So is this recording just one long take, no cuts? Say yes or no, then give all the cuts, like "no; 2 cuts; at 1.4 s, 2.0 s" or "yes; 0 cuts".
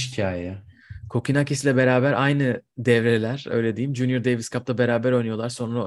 yes; 0 cuts